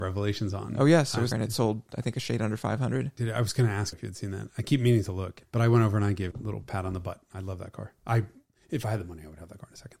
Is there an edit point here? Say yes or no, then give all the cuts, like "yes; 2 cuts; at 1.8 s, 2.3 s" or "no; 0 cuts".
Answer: yes; 4 cuts; at 1.3 s, 3.9 s, 5.4 s, 6.3 s